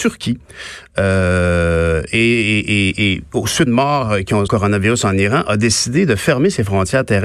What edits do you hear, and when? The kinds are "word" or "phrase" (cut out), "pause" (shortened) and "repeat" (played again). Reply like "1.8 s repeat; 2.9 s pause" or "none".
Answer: 3.7 s phrase; 4.5 s phrase

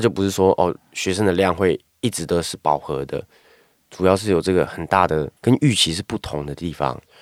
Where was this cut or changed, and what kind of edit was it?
5.4 s pause

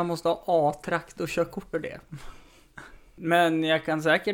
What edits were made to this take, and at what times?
1.7 s word

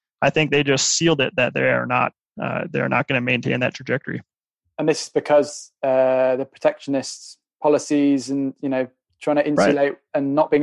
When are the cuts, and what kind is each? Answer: none

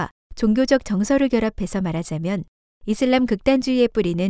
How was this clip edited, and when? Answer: none

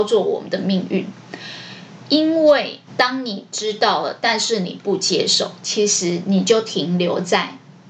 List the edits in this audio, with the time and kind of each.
2.9 s pause

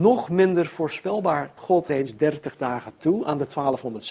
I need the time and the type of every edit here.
1.6 s phrase; 1.9 s word

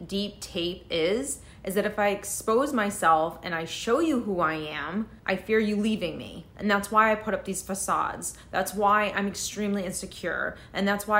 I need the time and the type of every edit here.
5.2 s pause

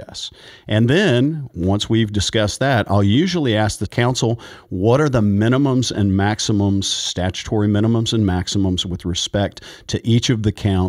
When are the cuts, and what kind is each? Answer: none

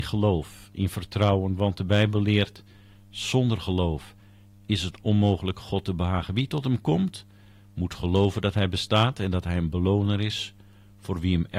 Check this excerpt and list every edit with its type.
none

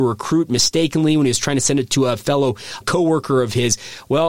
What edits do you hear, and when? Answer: 2.8 s word

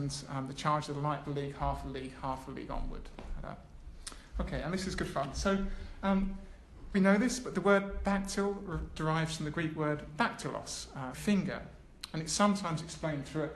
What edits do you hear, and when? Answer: 1.2 s phrase; 6.9 s word; 10.1 s word; 11.1 s word

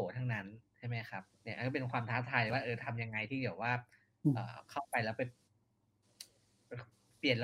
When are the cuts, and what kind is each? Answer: 1.3 s pause

